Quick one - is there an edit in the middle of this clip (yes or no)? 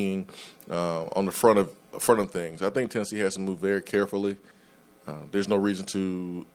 no